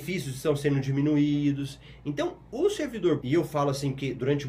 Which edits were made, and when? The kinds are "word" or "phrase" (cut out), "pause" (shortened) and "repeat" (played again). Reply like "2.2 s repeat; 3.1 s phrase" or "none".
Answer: 3.2 s word